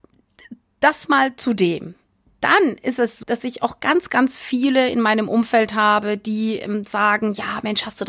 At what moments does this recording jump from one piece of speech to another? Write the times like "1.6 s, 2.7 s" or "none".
3.2 s